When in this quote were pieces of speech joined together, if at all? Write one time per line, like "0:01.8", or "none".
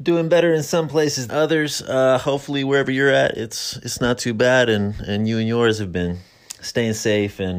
0:01.3

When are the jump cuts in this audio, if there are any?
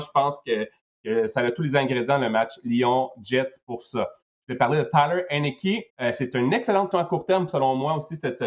0:05.9
0:06.9

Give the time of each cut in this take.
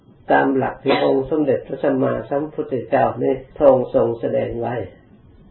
0:03.5

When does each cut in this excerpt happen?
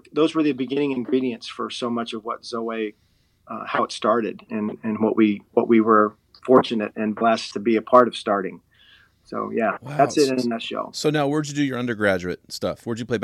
0:04.5
0:05.5

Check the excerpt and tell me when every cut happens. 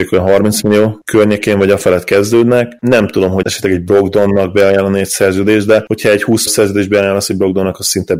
0:03.4
0:06.5

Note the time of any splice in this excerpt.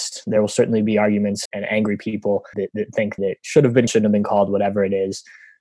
0:01.5
0:02.5
0:03.2
0:03.9

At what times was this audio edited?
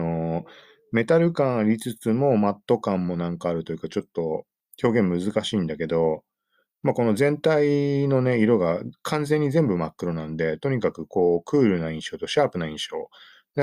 none

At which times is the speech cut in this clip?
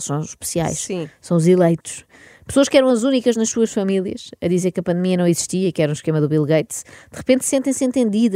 none

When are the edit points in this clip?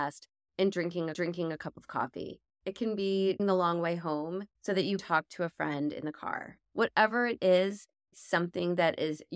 0:01.1
0:03.4
0:04.6
0:05.0
0:06.7
0:08.1

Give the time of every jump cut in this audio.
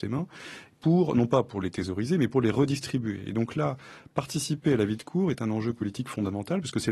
none

